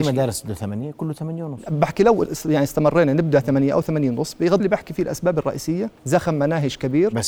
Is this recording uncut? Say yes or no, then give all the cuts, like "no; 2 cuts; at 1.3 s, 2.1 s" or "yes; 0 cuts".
no; 2 cuts; at 4.6 s, 6.0 s